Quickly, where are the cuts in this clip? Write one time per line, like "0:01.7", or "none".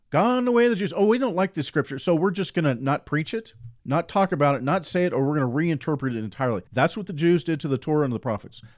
0:03.8
0:06.7